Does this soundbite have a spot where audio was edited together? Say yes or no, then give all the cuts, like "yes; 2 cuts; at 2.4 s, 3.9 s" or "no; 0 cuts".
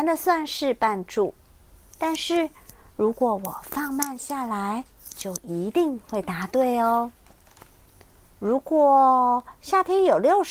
no; 0 cuts